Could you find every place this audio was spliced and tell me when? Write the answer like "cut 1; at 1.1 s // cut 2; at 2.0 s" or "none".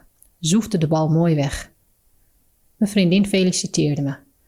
none